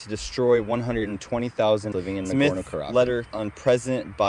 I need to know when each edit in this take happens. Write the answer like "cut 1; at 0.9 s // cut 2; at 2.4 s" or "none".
cut 1; at 1.9 s // cut 2; at 3.3 s